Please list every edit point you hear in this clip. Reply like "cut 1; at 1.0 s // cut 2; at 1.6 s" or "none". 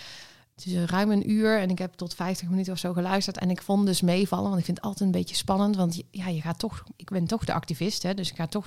cut 1; at 6.9 s